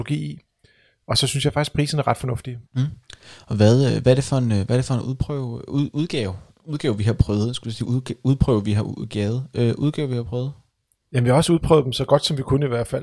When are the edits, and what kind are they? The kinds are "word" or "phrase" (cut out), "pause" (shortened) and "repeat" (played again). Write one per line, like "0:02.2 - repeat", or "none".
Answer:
0:02.7 - pause